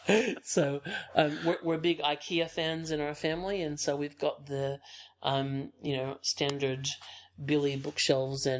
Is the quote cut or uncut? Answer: uncut